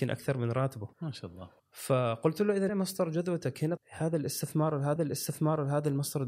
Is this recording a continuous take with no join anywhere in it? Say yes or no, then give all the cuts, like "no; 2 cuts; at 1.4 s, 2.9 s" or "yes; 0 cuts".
no; 5 cuts; at 0.9 s, 1.6 s, 2.7 s, 3.8 s, 5.0 s